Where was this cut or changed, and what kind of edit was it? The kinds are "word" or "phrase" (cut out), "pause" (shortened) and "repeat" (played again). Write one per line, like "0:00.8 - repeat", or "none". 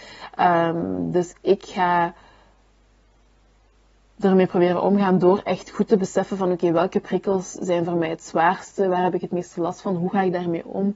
none